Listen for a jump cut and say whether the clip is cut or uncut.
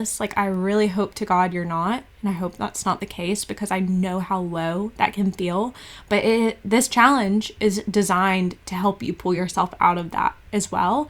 uncut